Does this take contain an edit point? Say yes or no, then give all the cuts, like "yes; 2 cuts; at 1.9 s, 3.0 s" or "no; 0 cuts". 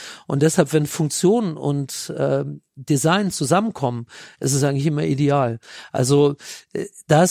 no; 0 cuts